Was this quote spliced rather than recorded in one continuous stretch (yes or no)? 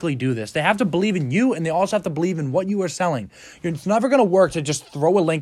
no